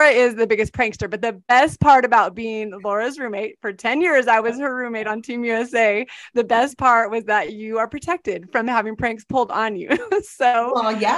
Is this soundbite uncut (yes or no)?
yes